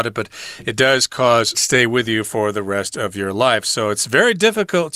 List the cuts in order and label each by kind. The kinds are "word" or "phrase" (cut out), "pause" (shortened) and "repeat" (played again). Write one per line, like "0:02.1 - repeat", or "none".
0:01.5 - phrase